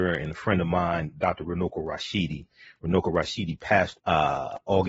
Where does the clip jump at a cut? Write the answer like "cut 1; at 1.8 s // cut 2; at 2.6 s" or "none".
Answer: cut 1; at 4.0 s